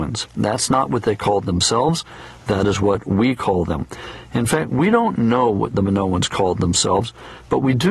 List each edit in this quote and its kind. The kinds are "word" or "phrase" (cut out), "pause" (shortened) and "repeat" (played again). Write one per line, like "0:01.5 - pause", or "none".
none